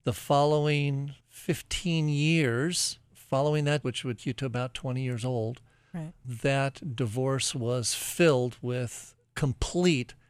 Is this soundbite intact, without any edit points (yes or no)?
no